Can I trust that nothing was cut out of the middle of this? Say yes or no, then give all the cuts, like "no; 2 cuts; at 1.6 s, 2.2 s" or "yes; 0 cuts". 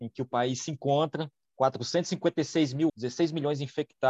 no; 2 cuts; at 1.4 s, 2.9 s